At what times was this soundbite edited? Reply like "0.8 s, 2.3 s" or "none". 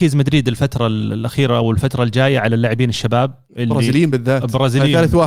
none